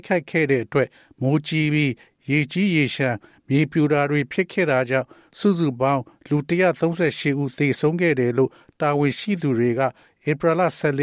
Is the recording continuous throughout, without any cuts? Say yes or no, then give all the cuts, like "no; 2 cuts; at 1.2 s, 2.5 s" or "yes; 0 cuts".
yes; 0 cuts